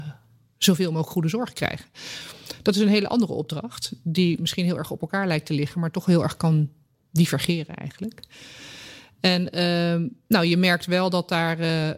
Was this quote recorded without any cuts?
yes; 0 cuts

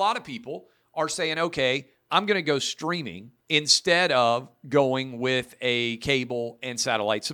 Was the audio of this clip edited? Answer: yes; 1 cut; at 3.4 s

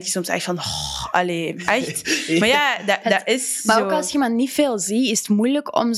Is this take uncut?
yes; 0 cuts

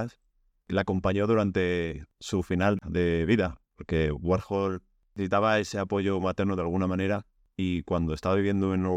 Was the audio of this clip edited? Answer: no; 0 cuts

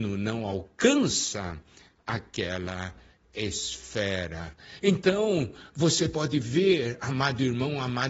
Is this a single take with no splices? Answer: yes; 0 cuts

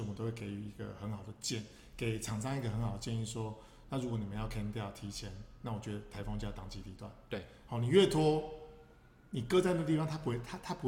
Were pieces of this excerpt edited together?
no; 0 cuts

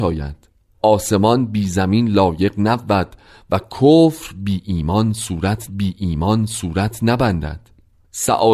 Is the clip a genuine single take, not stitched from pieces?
no; 1 cut; at 5.7 s

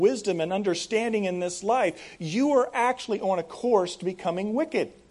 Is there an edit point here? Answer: no; 0 cuts

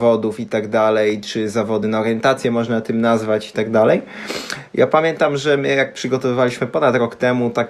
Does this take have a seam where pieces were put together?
no; 0 cuts

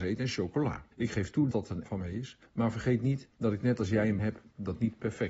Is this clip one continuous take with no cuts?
no; 6 cuts; at 0.9 s, 1.5 s, 1.9 s, 2.5 s, 3.3 s, 4.2 s

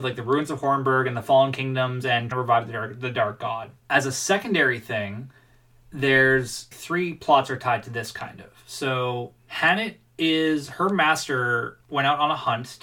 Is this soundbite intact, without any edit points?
no; 4 cuts; at 2.3 s, 3.8 s, 6.7 s, 9.4 s

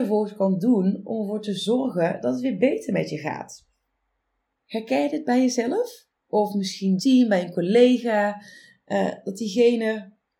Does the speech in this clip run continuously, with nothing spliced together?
no; 2 cuts; at 6.1 s, 7.0 s

